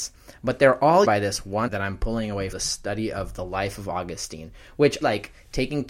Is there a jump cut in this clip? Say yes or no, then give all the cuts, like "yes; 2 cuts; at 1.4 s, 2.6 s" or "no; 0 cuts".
yes; 4 cuts; at 1.0 s, 1.7 s, 2.5 s, 5.0 s